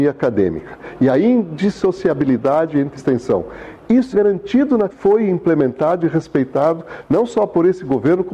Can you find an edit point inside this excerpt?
yes; 3 cuts; at 3.0 s, 4.1 s, 4.9 s

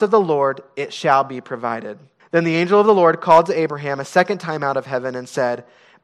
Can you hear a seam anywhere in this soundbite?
yes; 1 cut; at 2.2 s

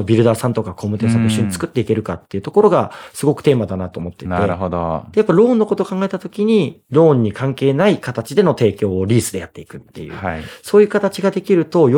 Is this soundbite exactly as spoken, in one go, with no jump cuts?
yes; 0 cuts

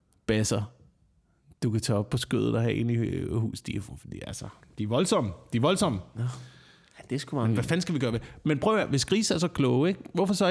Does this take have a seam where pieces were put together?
no; 0 cuts

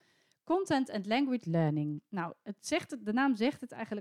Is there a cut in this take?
yes; 1 cut; at 1.4 s

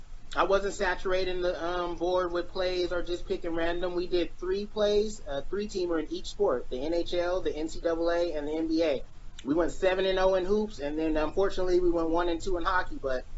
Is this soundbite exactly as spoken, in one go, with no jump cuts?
yes; 0 cuts

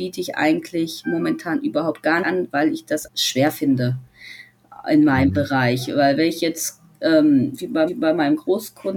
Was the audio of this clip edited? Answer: yes; 3 cuts; at 2.2 s, 3.1 s, 7.9 s

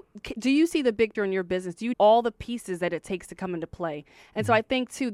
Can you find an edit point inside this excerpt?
yes; 2 cuts; at 1.1 s, 1.9 s

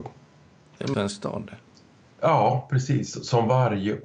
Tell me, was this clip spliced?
yes; 1 cut; at 0.9 s

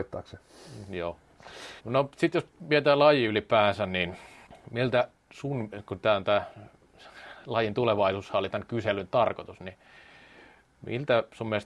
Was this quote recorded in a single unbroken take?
no; 2 cuts; at 1.8 s, 4.5 s

